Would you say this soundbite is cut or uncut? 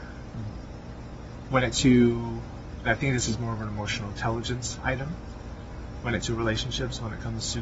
cut